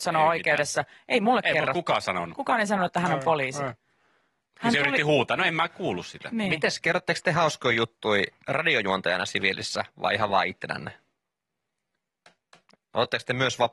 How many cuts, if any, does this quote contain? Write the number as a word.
zero